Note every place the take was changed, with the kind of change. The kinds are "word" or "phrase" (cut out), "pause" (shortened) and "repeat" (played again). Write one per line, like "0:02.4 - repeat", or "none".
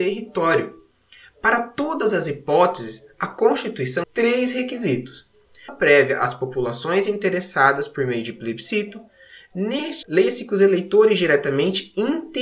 0:04.0 - word
0:05.7 - word
0:10.0 - word